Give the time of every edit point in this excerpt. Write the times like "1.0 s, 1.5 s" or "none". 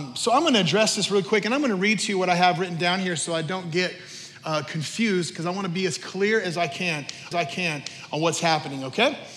7.3 s

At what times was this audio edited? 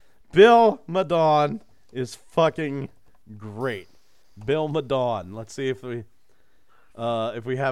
none

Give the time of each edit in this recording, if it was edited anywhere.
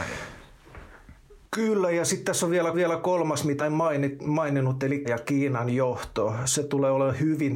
1.5 s, 2.7 s, 3.6 s, 5.0 s

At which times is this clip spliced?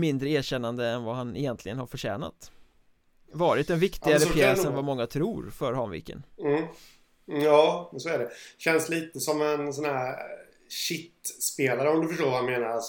none

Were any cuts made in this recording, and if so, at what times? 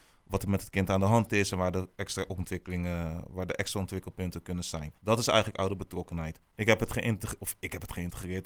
5.0 s, 6.4 s

